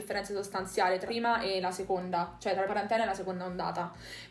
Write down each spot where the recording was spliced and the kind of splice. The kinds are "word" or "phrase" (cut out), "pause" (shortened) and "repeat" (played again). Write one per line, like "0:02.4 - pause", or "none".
0:01.1 - word
0:02.7 - word

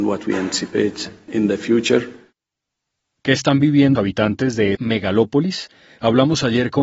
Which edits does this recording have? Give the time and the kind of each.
0:01.3 - word
0:04.0 - word
0:04.8 - word

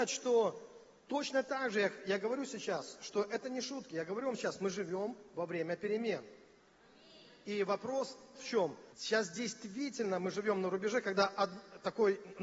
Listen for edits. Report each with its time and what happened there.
0:08.4 - word
0:08.9 - pause

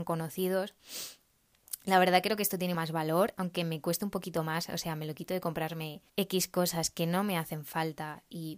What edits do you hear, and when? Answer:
0:02.7 - word
0:06.1 - pause

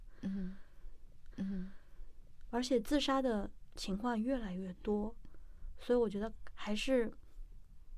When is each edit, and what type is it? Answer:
0:01.3 - repeat

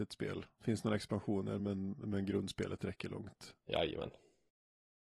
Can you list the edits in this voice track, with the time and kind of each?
none

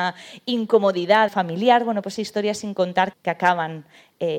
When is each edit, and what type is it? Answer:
0:01.3 - phrase
0:02.2 - phrase
0:03.1 - word

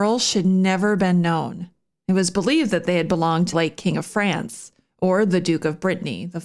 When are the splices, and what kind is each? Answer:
0:03.5 - word

